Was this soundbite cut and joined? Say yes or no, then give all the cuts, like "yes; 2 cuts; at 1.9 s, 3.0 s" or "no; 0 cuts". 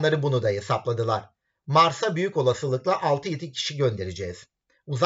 no; 0 cuts